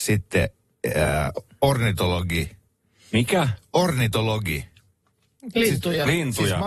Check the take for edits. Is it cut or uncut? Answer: uncut